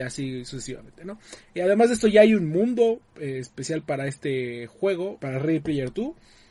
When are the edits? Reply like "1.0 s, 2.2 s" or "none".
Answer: 3.0 s, 5.2 s